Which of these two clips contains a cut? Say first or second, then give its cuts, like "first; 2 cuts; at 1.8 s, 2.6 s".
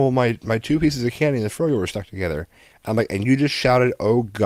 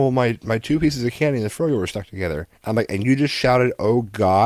second; 1 cut; at 2.5 s